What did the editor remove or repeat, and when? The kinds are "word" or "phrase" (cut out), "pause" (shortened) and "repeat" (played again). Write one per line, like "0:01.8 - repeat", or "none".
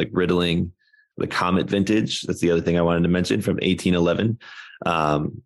none

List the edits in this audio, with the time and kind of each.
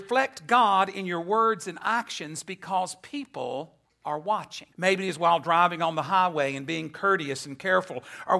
0:03.8 - pause
0:04.7 - pause

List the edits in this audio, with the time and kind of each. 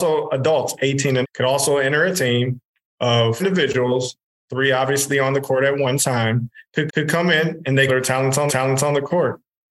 0:01.2 - word
0:03.4 - word
0:06.9 - repeat
0:07.9 - phrase
0:08.5 - repeat

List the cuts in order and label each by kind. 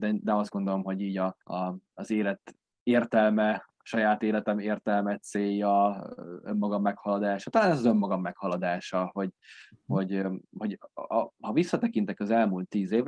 0:01.4 - pause

